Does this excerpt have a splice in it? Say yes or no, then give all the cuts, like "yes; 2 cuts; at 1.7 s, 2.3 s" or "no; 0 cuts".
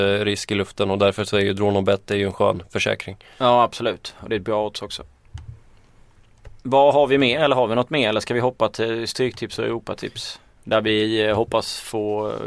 yes; 1 cut; at 6.6 s